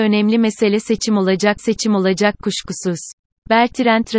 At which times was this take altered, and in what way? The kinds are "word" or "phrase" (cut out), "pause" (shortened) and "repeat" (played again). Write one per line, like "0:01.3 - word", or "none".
0:01.6 - repeat